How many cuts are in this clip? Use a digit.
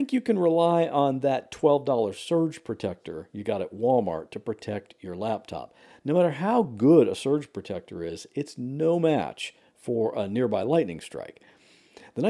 0